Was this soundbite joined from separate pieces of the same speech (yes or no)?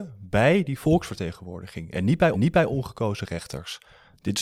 yes